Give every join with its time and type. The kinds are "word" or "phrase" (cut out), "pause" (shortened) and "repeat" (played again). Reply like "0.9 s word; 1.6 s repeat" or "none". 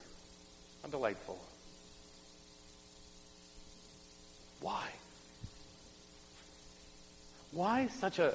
none